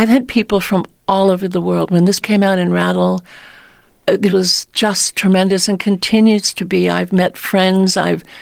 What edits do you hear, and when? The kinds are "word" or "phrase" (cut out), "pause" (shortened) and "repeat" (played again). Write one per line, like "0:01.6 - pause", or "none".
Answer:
0:02.2 - word
0:04.3 - word

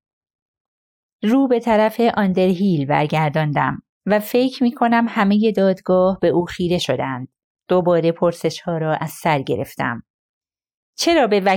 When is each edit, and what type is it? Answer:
none

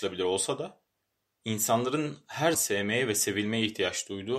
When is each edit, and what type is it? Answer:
0:02.5 - word

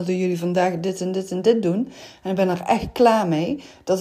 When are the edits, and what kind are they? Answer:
none

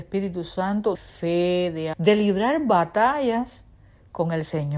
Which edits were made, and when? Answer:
0:00.9 - word
0:01.9 - word

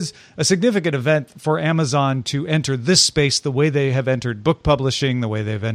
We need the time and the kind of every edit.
none

